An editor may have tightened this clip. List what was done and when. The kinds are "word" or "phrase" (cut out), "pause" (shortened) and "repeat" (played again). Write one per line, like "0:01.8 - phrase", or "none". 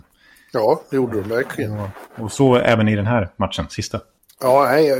none

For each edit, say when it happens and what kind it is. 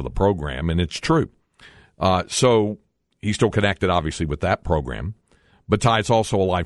none

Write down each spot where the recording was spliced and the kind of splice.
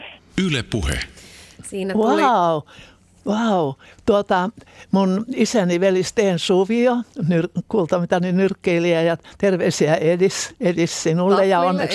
none

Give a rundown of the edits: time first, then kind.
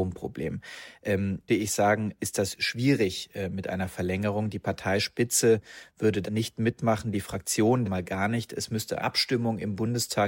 0:01.5 - phrase
0:06.3 - word
0:07.8 - phrase
0:09.0 - word

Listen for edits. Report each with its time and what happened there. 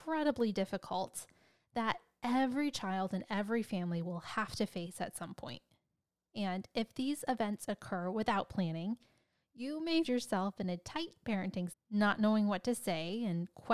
0:10.0 - word
0:11.7 - word

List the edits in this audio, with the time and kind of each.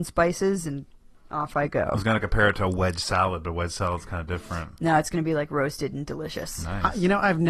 none

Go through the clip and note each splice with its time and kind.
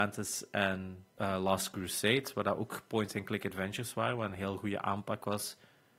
0:01.1 - pause

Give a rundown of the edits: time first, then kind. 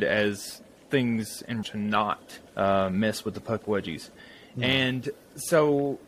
0:01.6 - word
0:02.5 - pause

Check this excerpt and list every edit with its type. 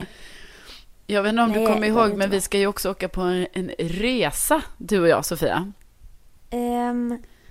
none

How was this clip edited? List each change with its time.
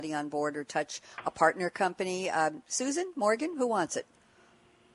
none

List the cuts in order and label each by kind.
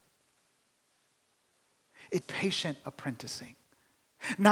0:02.2 - word

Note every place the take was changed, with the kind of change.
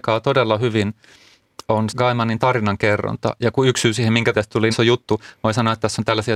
0:01.9 - word
0:04.3 - word
0:04.7 - word

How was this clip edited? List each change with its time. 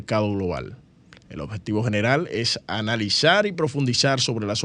none

